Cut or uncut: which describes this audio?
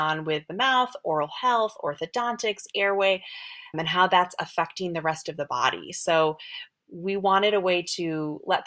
cut